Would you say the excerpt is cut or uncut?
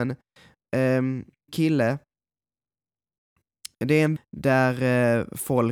cut